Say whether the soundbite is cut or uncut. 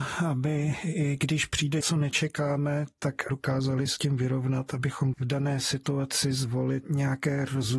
cut